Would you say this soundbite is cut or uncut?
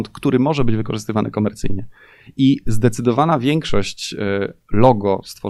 uncut